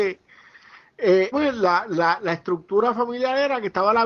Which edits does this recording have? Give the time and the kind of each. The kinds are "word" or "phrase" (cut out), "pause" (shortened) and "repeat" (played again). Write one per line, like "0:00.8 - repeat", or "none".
0:01.3 - phrase